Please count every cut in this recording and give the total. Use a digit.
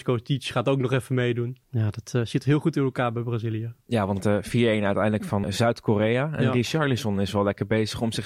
3